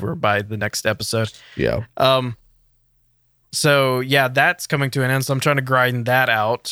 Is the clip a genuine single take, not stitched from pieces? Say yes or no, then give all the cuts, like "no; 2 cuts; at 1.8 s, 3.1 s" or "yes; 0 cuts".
yes; 0 cuts